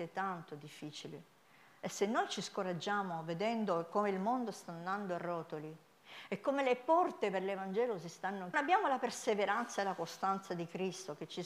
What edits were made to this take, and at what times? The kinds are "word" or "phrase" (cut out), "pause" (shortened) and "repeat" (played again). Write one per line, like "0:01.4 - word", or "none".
0:08.5 - phrase

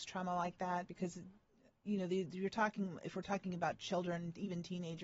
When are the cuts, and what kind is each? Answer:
none

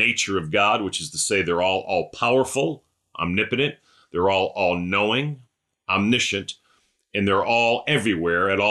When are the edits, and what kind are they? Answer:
none

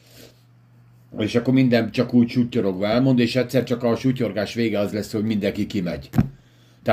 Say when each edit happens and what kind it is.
none

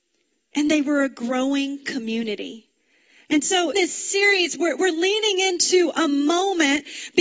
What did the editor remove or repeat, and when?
0:03.7 - word

